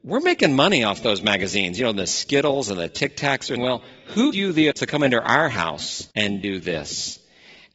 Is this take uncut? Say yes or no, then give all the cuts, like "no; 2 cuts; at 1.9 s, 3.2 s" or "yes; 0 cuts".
no; 4 cuts; at 3.6 s, 4.3 s, 4.7 s, 6.1 s